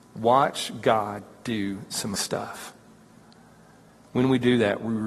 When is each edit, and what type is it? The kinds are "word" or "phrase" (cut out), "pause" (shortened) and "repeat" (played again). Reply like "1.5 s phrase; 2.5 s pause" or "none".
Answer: 2.1 s word